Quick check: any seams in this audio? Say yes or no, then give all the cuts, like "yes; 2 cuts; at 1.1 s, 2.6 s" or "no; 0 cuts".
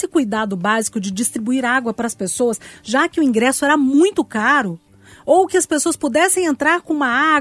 no; 0 cuts